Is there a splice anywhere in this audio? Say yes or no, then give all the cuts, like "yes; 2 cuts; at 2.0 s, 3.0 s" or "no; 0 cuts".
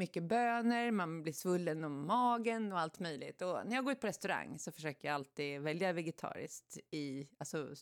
no; 0 cuts